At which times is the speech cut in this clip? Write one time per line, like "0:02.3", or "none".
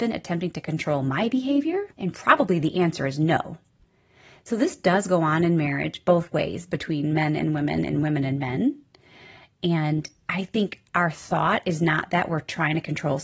0:01.9

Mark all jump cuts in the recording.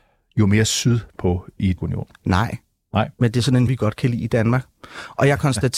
0:01.2
0:01.8
0:03.7

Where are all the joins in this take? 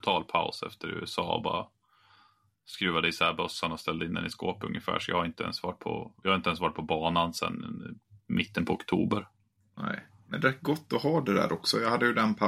none

